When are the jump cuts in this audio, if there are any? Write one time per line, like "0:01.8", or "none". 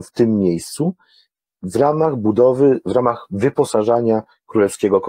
none

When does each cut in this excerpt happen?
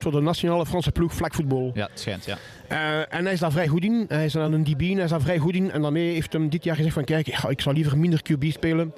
none

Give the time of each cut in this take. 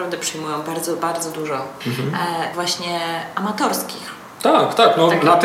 0:01.0
0:01.8
0:02.5

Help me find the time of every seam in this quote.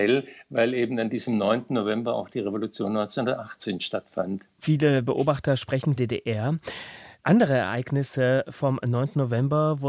0:06.0

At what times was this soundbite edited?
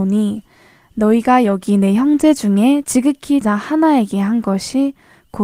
0:03.4

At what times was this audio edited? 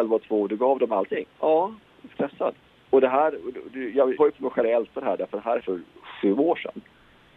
0:01.3
0:02.1
0:02.6
0:04.2
0:04.6
0:05.6

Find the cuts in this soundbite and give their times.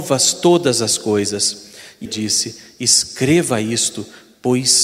0:02.1

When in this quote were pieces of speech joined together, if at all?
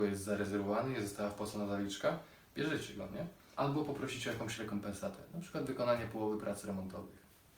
none

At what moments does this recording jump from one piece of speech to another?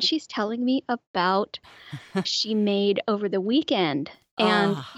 0:02.2

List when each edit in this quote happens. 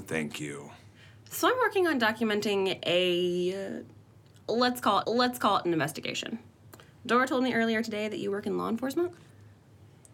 0:05.0

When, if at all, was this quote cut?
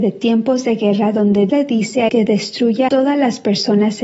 0:01.5
0:02.1
0:02.9

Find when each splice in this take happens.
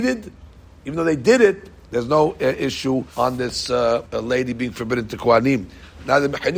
0:03.1
0:04.1

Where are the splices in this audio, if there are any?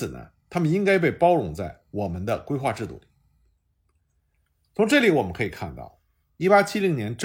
none

